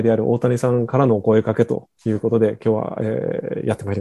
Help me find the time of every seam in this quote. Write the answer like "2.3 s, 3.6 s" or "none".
none